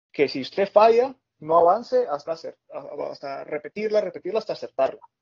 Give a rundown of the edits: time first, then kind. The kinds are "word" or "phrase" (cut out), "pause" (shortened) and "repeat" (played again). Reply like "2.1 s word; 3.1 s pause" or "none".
2.3 s word